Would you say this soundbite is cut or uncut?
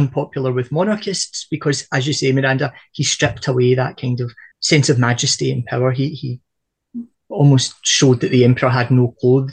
cut